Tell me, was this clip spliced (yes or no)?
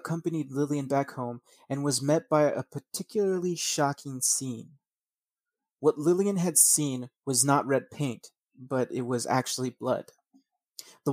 no